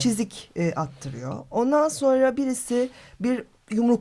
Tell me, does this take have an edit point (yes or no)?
no